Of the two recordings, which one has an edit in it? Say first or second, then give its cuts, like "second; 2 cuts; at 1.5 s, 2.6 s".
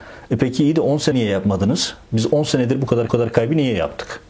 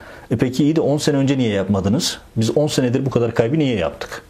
first; 2 cuts; at 1.1 s, 3.1 s